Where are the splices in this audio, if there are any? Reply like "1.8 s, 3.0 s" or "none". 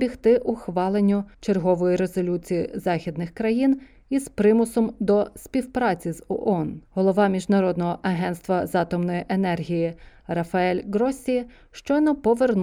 1.3 s, 6.8 s